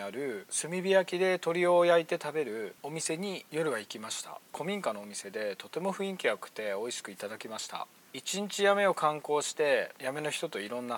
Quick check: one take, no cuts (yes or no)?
yes